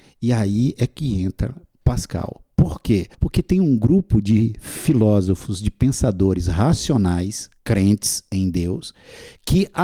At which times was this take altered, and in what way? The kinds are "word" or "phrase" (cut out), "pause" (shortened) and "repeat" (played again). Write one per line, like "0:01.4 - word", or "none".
0:03.1 - pause
0:07.6 - pause

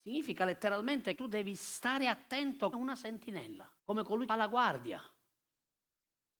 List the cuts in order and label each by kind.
0:01.2 - word
0:02.7 - word
0:03.8 - pause
0:04.3 - word

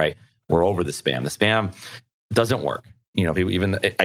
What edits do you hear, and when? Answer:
none

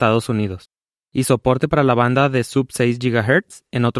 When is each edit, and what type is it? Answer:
none

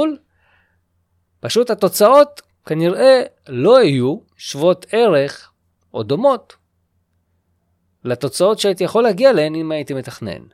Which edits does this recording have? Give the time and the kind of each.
0:04.3 - pause

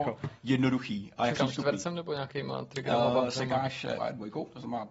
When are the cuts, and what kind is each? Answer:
0:01.3 - word
0:04.0 - word

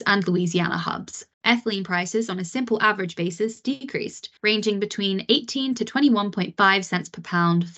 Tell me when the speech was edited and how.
0:01.3 - pause
0:04.4 - pause

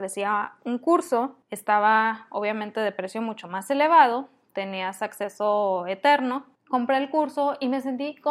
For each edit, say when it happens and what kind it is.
0:01.4 - pause
0:06.6 - pause

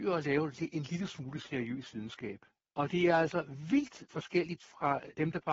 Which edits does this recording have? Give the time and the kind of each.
0:04.1 - word

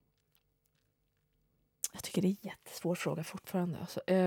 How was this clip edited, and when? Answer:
0:02.4 - word

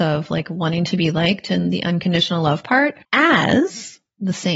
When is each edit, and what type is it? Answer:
0:03.0 - pause

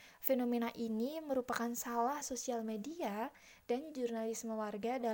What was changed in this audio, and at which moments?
0:02.2 - phrase

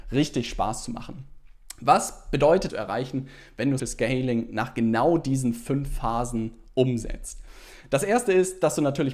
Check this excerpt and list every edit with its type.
0:02.7 - phrase
0:03.8 - word

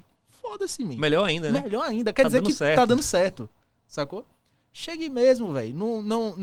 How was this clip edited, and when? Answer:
none

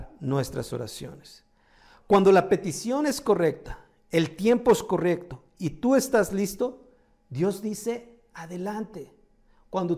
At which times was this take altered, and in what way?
none

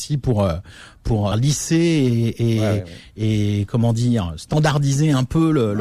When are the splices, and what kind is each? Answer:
0:01.3 - phrase

